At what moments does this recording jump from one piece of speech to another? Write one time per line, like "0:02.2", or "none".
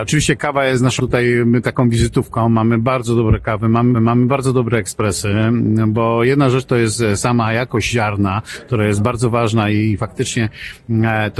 0:01.0
0:03.9